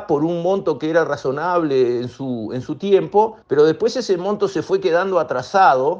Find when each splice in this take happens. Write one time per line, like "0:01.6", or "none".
0:03.4